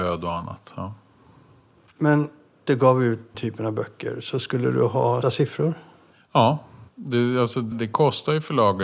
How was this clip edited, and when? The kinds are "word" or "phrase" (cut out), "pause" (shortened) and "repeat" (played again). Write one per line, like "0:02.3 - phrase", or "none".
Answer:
0:02.7 - phrase
0:03.3 - word
0:05.2 - word
0:06.9 - pause
0:07.7 - word

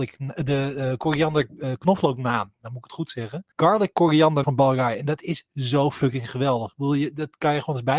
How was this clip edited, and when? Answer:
0:03.5 - pause
0:04.4 - word

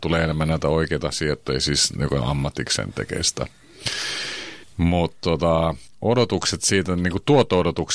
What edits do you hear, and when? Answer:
none

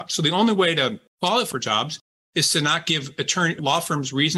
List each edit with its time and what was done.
0:01.5 - word

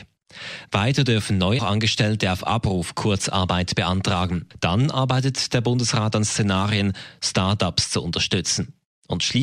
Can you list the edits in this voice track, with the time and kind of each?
0:01.6 - word

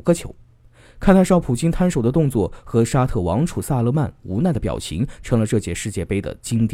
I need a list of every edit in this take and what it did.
none

